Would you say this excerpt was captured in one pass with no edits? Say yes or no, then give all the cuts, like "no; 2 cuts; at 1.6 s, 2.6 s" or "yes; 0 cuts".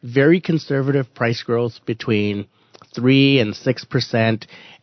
yes; 0 cuts